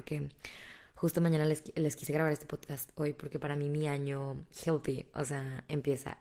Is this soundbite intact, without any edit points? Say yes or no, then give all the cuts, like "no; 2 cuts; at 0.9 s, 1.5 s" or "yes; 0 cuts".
yes; 0 cuts